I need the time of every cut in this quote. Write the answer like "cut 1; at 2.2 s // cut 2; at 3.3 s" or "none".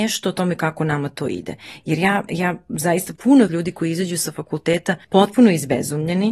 cut 1; at 2.3 s // cut 2; at 3.2 s // cut 3; at 3.5 s // cut 4; at 5.0 s